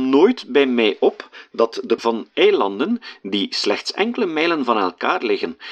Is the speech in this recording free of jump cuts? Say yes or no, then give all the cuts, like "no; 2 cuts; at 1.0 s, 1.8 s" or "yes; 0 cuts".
no; 1 cut; at 2.0 s